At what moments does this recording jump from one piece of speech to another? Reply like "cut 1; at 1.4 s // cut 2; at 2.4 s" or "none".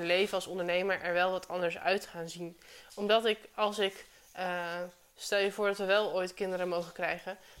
none